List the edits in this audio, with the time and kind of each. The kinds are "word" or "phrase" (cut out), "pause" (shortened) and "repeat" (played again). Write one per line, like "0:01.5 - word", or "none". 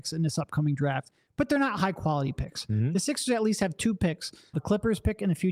0:04.5 - word